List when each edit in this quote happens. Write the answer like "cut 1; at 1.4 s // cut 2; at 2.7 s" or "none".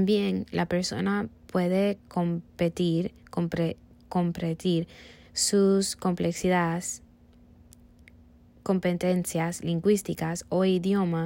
none